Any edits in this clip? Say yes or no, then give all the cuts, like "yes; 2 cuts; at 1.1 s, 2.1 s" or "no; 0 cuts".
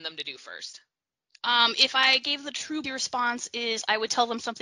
yes; 1 cut; at 2.8 s